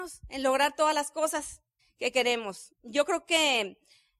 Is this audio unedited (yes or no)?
no